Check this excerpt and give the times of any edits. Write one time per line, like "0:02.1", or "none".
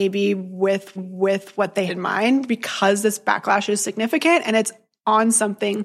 0:01.0
0:01.9
0:03.8